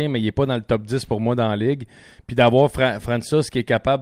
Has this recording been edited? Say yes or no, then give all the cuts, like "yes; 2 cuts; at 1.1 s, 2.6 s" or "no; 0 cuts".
no; 0 cuts